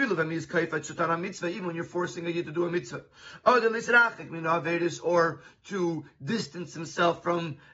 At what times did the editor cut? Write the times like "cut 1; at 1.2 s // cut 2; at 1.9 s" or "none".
none